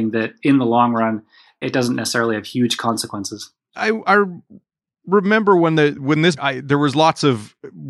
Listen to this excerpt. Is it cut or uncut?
cut